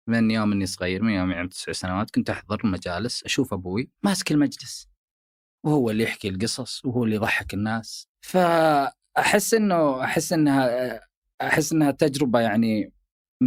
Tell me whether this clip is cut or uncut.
cut